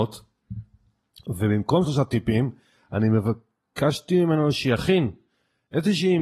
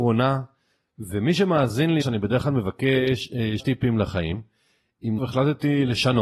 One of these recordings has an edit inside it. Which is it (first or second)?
second